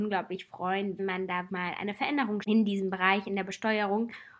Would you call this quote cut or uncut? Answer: cut